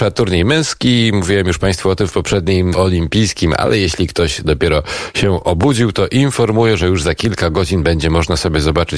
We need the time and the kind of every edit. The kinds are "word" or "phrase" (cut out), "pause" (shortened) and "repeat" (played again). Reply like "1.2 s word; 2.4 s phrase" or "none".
2.7 s word